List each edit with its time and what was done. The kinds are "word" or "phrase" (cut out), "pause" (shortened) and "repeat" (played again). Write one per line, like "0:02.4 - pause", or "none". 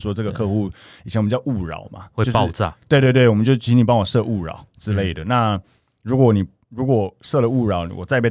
none